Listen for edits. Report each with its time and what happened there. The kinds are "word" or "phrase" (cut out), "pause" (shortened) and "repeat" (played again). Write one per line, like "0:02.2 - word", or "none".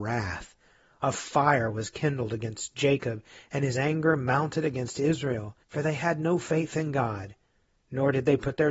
0:05.6 - pause